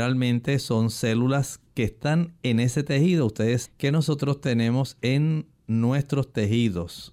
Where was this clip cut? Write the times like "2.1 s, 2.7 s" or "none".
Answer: 3.6 s